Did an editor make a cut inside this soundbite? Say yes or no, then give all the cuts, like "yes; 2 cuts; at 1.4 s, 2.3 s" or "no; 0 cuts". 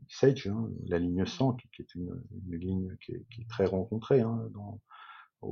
no; 0 cuts